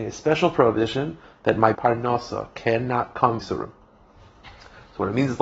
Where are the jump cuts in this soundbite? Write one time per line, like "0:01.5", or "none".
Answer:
0:01.7
0:03.4

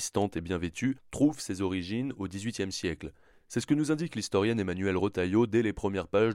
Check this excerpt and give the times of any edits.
none

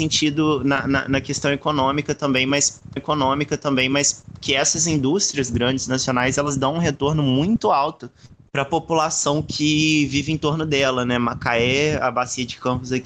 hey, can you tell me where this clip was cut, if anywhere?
0:03.0

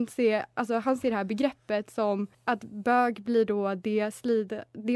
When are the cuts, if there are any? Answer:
0:02.3

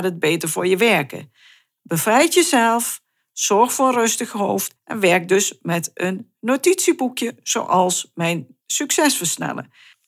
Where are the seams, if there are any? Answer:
0:04.8
0:08.6

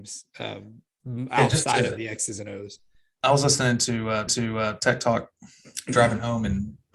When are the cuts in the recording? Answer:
0:04.3

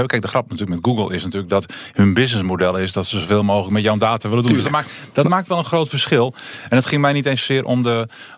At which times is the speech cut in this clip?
none

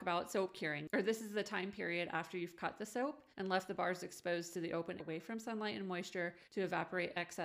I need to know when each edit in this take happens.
0:03.3
0:05.0
0:06.4

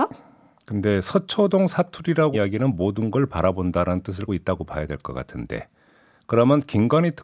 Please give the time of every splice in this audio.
0:02.3
0:03.3
0:04.3

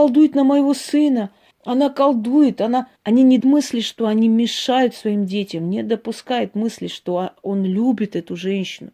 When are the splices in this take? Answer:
0:01.5
0:03.0
0:03.4

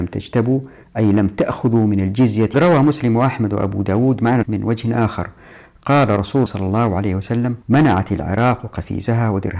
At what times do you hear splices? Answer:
0:02.5
0:04.4
0:06.5
0:07.6

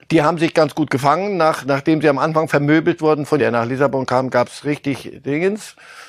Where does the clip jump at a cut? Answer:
0:03.4

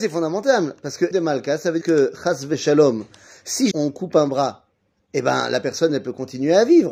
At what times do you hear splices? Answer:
0:01.1
0:01.8
0:03.7

